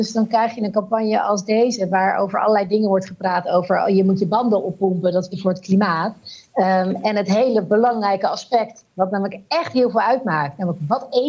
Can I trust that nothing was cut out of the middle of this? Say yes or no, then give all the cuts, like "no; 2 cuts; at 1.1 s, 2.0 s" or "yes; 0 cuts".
no; 1 cut; at 5.3 s